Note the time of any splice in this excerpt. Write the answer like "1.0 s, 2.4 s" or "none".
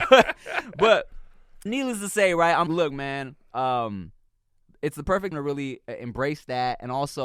1.7 s, 2.7 s, 5.3 s